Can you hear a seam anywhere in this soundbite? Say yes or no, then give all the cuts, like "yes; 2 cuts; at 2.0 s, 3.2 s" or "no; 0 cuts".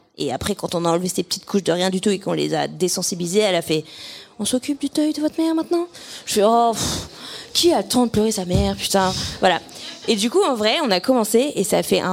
no; 0 cuts